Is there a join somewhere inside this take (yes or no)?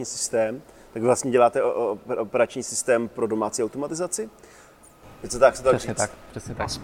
no